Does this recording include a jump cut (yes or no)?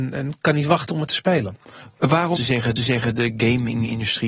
yes